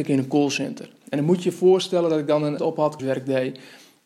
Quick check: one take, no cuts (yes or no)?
no